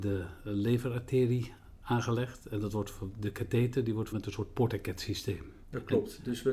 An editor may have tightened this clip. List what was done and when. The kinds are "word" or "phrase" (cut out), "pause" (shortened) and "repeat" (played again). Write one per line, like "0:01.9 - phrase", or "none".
0:04.1 - word